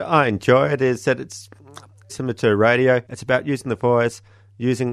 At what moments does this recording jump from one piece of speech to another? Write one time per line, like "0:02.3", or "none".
0:02.1
0:03.1